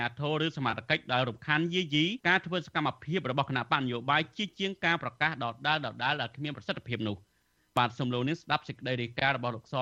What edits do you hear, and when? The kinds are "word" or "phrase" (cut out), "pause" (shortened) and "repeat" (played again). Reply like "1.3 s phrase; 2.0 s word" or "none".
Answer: 2.2 s pause